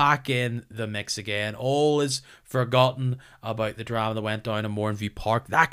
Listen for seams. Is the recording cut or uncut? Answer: uncut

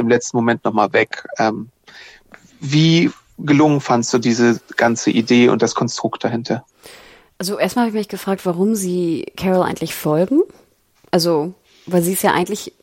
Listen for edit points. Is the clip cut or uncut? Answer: uncut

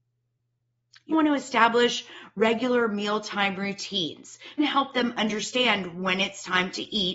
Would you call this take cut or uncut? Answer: cut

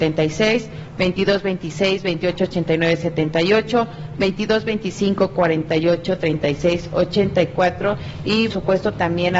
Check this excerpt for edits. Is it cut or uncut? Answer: cut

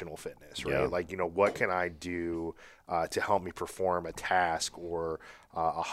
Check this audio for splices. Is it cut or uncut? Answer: uncut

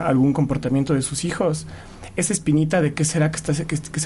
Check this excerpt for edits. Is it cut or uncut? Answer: uncut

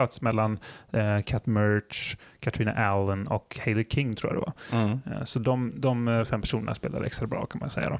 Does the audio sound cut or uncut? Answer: uncut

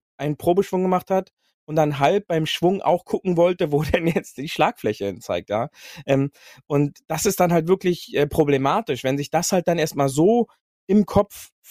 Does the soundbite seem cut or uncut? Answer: uncut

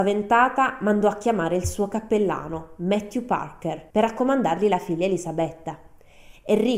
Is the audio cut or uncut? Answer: cut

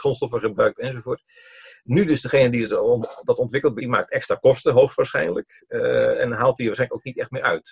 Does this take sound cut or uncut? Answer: cut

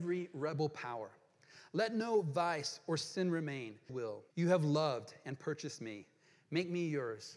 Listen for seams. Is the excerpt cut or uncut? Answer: cut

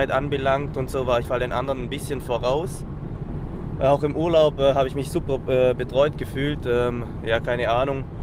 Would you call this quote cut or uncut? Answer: cut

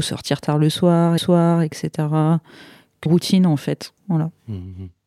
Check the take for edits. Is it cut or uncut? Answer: cut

